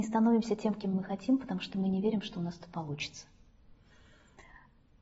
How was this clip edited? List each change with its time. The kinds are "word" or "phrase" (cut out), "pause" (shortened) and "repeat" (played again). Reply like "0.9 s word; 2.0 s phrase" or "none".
none